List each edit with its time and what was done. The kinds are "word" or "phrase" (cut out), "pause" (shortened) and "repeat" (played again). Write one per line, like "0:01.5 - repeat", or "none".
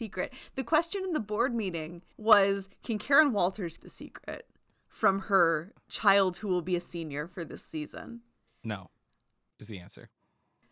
0:02.1 - pause
0:03.8 - word
0:08.5 - pause